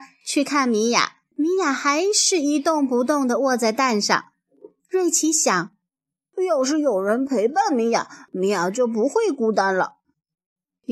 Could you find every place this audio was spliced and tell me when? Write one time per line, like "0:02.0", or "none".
0:01.3